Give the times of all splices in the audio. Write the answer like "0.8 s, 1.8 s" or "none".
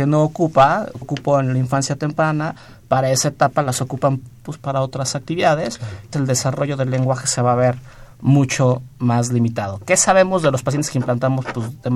1.0 s, 6.1 s